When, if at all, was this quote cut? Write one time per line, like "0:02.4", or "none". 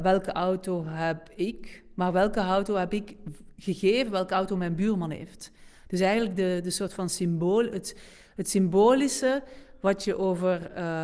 none